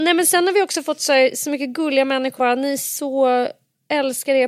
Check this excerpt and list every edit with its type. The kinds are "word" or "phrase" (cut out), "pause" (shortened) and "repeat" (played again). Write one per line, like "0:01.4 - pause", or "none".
0:02.4 - word

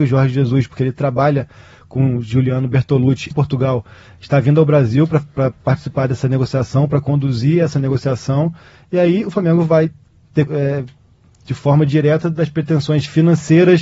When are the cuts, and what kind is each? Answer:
0:03.3 - word
0:10.5 - word

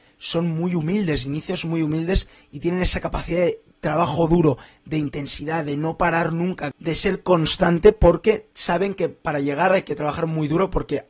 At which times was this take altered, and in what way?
none

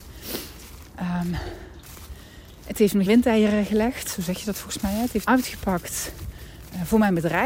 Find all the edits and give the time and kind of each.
0:03.1 - word
0:05.2 - word

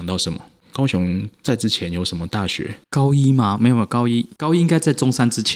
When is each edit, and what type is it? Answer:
0:01.3 - pause
0:02.8 - pause

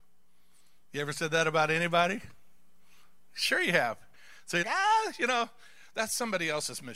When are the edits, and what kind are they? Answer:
0:04.6 - word

